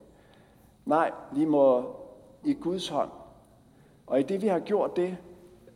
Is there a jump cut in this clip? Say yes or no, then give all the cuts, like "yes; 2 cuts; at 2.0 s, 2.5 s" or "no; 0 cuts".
yes; 1 cut; at 2.4 s